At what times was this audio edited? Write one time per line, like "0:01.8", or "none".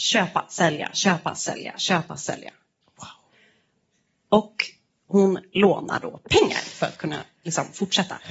none